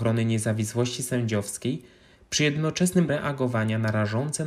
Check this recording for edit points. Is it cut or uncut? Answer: cut